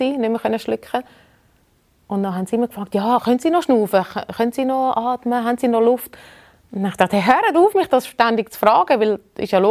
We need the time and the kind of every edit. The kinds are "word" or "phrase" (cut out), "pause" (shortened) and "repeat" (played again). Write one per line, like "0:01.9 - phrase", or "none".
none